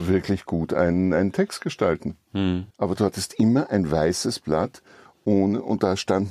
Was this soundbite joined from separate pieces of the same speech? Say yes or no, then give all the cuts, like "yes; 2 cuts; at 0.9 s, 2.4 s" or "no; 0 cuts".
yes; 1 cut; at 2.7 s